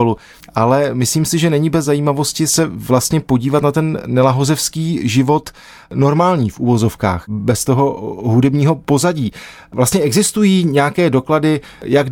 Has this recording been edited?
no; 0 cuts

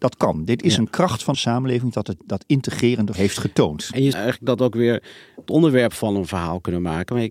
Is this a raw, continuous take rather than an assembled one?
no; 5 cuts; at 1.3 s, 2.2 s, 3.1 s, 4.1 s, 5.5 s

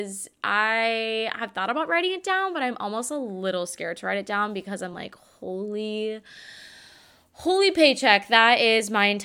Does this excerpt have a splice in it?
no; 0 cuts

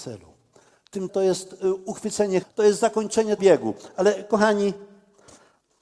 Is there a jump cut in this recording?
yes; 3 cuts; at 1.1 s, 2.4 s, 3.4 s

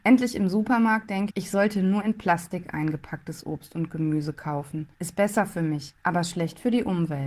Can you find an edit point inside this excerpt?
yes; 3 cuts; at 1.3 s, 4.9 s, 6.0 s

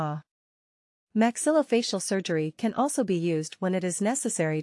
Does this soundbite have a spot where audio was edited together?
no; 0 cuts

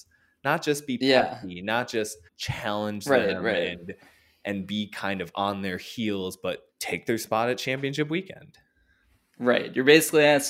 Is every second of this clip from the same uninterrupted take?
no; 2 cuts; at 2.3 s, 6.7 s

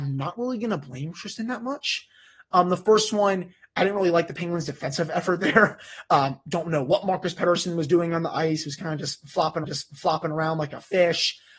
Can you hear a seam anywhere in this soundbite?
yes; 1 cut; at 9.6 s

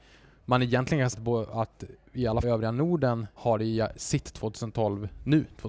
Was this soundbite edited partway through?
yes; 4 cuts; at 1.1 s, 2.4 s, 3.4 s, 3.9 s

